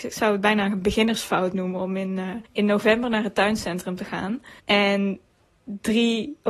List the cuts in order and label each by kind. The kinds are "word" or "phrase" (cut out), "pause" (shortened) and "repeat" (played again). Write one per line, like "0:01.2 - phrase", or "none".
0:02.5 - pause
0:04.6 - pause